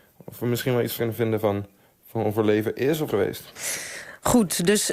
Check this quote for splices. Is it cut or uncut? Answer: cut